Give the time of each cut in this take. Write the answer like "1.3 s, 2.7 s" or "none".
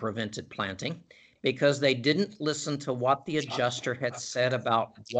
none